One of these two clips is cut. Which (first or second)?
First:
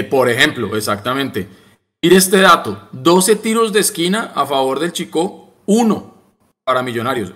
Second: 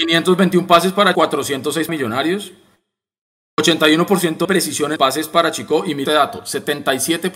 second